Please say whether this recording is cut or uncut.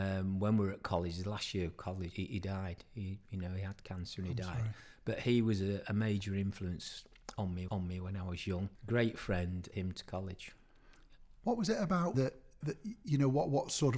cut